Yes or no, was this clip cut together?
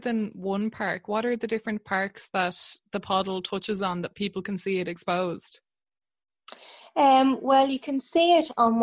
no